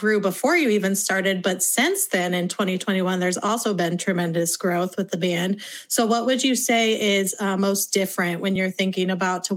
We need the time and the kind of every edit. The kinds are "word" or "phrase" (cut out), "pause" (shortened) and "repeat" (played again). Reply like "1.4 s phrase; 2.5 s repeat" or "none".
none